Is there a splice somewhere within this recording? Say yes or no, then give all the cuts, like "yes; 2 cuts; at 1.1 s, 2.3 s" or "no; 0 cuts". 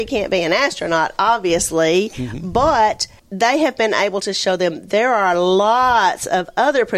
yes; 1 cut; at 3.2 s